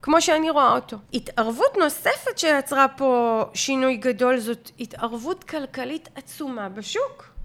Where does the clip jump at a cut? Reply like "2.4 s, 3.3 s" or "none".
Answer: 1.0 s